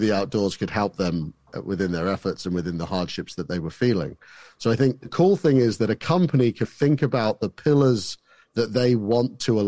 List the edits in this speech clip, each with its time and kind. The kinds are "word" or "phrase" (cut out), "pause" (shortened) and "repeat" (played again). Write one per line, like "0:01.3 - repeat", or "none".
0:06.6 - word